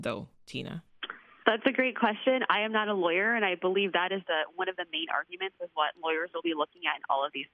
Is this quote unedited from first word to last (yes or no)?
yes